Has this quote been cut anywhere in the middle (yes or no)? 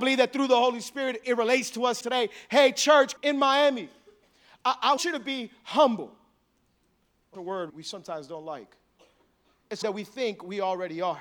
yes